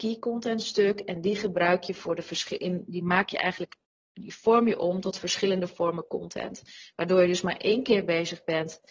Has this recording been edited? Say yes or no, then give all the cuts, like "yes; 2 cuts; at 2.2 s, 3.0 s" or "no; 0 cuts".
no; 0 cuts